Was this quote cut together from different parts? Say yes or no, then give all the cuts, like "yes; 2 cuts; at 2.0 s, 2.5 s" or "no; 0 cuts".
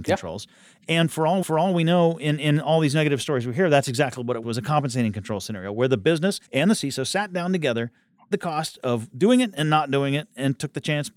yes; 4 cuts; at 1.4 s, 4.4 s, 6.5 s, 8.3 s